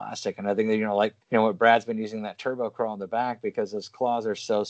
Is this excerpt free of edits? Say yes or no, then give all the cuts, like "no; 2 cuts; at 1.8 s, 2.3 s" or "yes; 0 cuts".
no; 1 cut; at 1.2 s